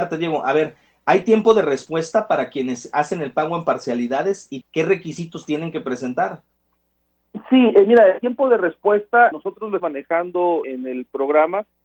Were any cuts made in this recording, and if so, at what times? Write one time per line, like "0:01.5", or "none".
0:04.6
0:09.3
0:09.8
0:10.6